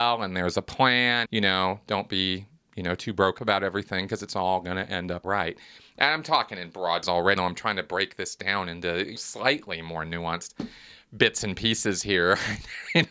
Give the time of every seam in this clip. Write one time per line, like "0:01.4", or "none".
0:01.3
0:03.4
0:05.2
0:07.0
0:07.4
0:09.2